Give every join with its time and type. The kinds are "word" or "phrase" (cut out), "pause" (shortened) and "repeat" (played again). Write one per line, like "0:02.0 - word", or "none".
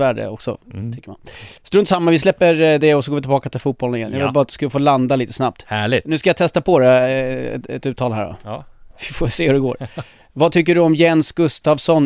0:01.6 - pause
0:08.9 - pause

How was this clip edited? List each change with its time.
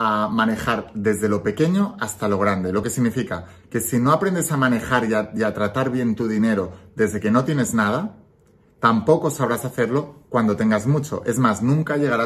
none

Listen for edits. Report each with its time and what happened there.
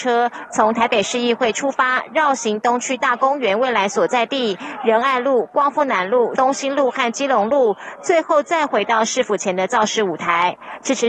0:06.4 - phrase

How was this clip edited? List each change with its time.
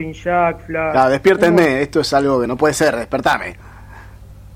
0:02.5 - word

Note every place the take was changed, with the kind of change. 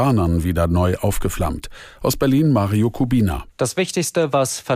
0:03.5 - pause

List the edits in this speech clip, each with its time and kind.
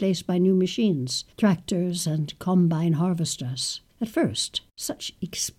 0:01.3 - pause
0:03.9 - pause
0:04.7 - pause

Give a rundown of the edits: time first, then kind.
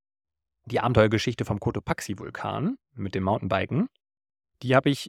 none

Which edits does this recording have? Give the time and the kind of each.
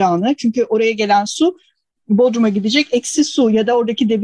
none

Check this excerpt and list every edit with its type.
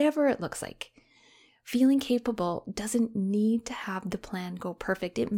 none

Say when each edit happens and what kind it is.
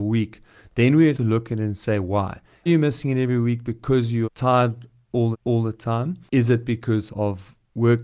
0:01.1 - word
0:02.7 - word
0:04.2 - word
0:05.3 - repeat
0:06.3 - pause
0:07.1 - word

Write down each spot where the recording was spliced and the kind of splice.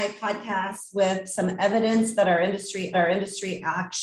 0:02.9 - repeat

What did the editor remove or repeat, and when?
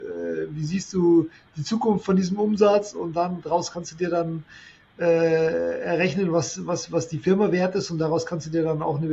none

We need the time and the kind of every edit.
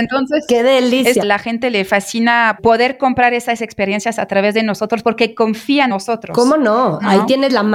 0:01.2 - phrase
0:02.6 - word
0:05.9 - word

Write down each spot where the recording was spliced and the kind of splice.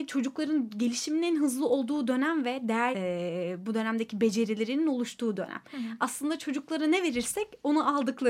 0:02.9 - word

